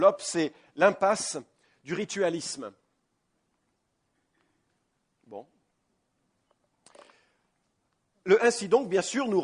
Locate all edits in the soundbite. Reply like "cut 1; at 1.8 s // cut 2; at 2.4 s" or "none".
none